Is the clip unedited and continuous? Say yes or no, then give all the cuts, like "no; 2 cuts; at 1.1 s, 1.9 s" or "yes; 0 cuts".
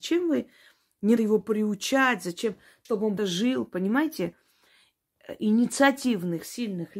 no; 3 cuts; at 1.2 s, 2.8 s, 3.2 s